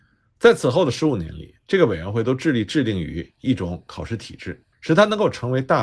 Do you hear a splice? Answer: yes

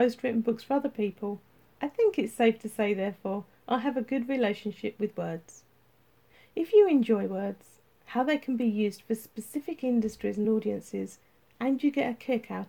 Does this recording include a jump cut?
no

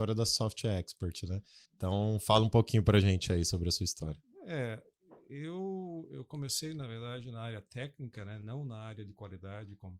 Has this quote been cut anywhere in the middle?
yes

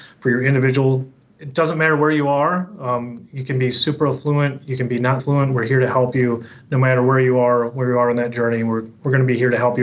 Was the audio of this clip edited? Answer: yes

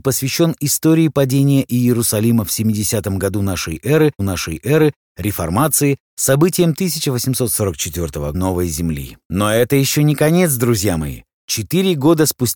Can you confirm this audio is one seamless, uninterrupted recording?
no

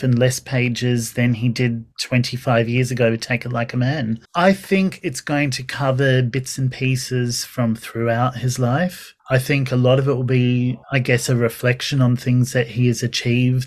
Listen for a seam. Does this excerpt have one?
yes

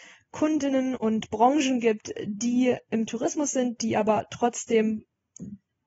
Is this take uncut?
yes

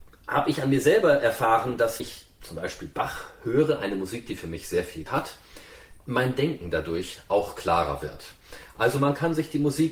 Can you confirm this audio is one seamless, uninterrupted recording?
no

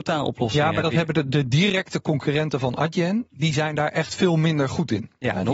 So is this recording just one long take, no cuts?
yes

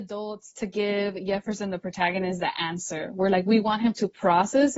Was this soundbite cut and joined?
no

